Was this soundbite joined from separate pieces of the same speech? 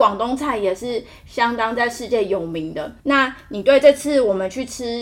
yes; 1 cut; at 3.0 s

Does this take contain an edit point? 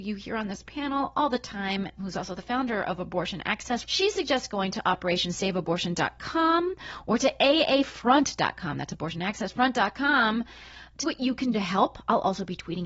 yes; 4 cuts; at 2.0 s, 3.8 s, 11.0 s, 11.5 s

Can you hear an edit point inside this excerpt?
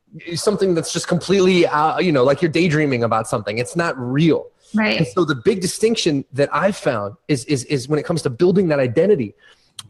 no; 0 cuts

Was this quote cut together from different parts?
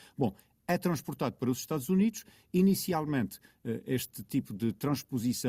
no; 0 cuts

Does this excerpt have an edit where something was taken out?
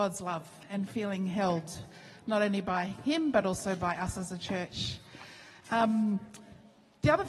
no; 0 cuts

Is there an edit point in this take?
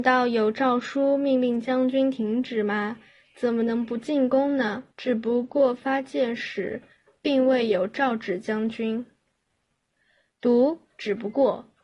yes; 1 cut; at 4.9 s

